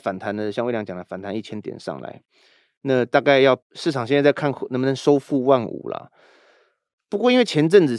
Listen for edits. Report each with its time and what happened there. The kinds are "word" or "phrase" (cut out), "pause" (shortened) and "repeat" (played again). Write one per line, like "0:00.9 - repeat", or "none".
0:03.6 - pause